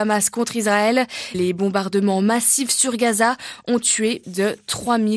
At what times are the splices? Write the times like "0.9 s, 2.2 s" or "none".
1.3 s, 4.2 s